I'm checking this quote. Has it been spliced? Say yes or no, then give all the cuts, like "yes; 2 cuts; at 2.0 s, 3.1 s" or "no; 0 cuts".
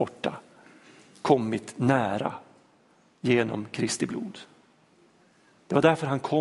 no; 0 cuts